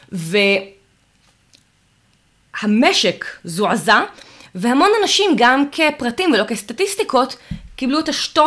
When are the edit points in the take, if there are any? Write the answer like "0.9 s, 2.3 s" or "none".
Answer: none

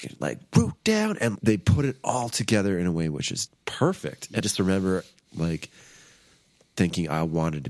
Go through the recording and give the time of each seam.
1.4 s, 3.5 s, 4.4 s

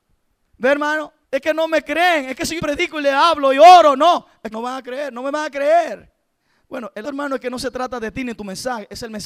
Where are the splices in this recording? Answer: 1.2 s, 2.6 s, 4.5 s, 6.4 s, 7.0 s

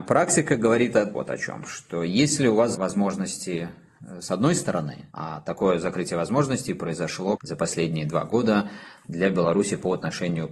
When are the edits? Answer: 1.1 s, 2.7 s, 5.1 s, 7.4 s

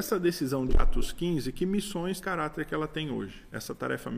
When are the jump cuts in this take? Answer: 2.2 s

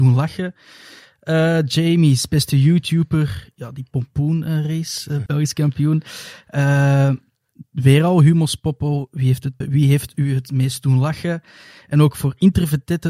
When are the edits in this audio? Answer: 5.3 s, 9.6 s

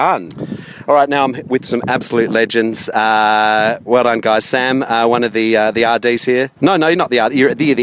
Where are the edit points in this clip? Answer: 6.6 s

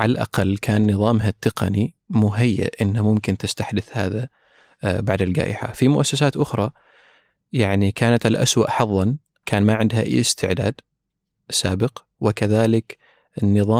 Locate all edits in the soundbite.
none

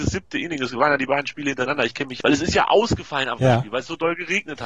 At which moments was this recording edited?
2.2 s, 3.4 s

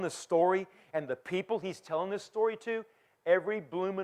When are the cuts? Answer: none

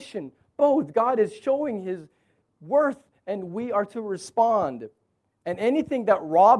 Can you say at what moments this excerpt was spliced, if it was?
none

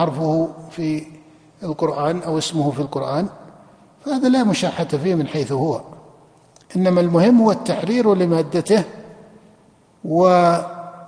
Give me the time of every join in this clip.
none

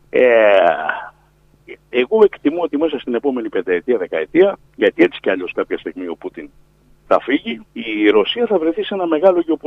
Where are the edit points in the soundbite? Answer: 4.7 s, 7.7 s

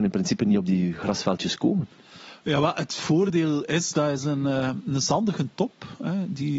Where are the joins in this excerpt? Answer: none

